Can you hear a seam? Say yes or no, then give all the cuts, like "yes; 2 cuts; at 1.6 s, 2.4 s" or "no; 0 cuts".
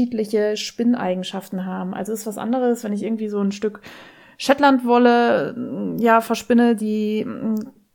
no; 0 cuts